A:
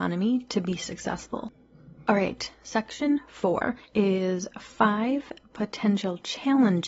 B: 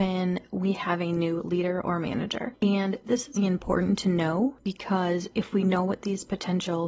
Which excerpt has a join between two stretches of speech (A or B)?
B